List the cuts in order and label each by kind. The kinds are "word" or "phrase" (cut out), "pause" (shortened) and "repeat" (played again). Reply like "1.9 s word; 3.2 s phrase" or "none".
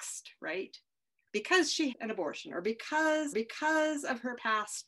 1.9 s word; 3.3 s repeat

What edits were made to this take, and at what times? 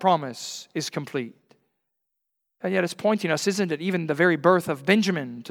none

